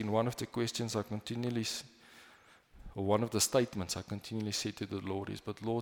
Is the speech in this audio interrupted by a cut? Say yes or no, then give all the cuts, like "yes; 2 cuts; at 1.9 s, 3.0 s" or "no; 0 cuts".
no; 0 cuts